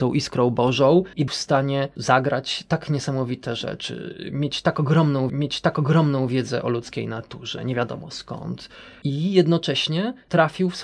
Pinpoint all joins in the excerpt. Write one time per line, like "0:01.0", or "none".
0:01.3
0:05.3